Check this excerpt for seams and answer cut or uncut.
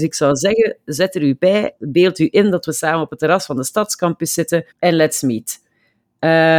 cut